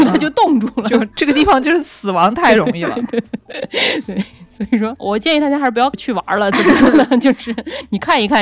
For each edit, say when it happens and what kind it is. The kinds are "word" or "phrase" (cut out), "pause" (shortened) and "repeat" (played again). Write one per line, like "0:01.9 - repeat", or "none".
0:05.0 - word